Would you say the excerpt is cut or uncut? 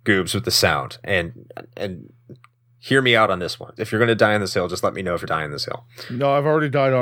cut